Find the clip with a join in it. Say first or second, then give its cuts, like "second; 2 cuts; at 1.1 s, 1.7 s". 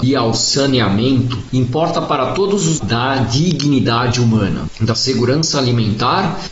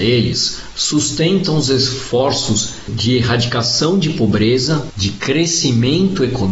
first; 1 cut; at 2.8 s